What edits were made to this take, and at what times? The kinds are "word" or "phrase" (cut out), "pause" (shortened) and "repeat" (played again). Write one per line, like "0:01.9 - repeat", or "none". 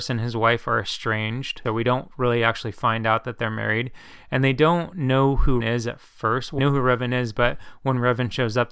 0:01.7 - word
0:05.6 - word
0:06.6 - word

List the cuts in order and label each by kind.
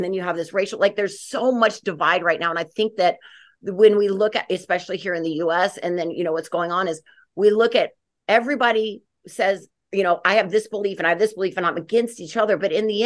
none

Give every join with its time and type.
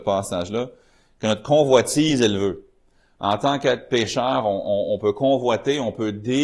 none

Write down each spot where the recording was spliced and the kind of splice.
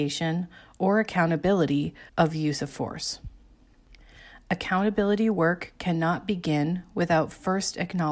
0:02.1 - pause

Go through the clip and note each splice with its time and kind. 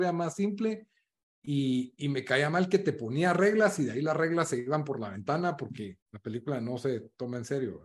0:06.0 - pause

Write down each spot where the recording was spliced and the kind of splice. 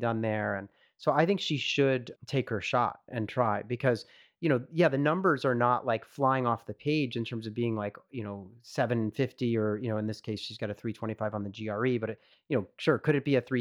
0:02.2 - word
0:03.1 - word

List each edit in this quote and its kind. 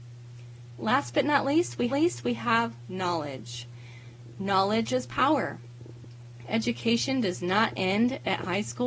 0:01.9 - repeat

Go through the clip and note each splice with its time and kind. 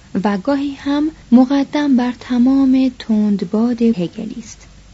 0:01.2 - pause
0:03.9 - word

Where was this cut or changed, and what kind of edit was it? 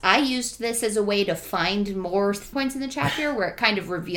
0:02.5 - word

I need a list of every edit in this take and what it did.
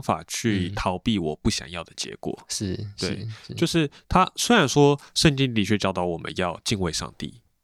none

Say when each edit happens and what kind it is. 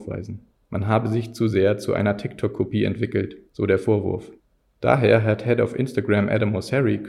none

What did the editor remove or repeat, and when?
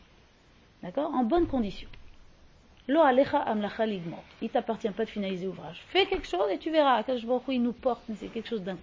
none

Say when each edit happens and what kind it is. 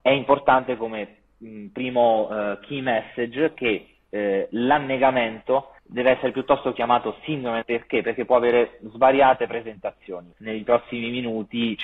0:05.8 - pause
0:07.6 - word
0:10.3 - phrase

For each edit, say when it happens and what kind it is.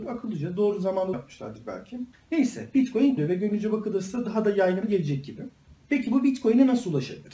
0:01.1 - phrase
0:02.1 - pause
0:03.2 - word
0:04.8 - word
0:05.7 - pause

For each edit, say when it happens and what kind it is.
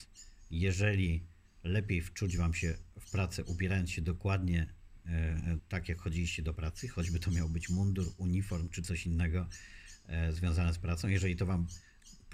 none

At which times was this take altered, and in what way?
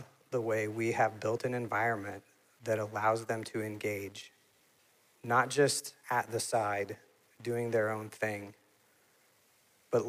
0:06.0 - pause

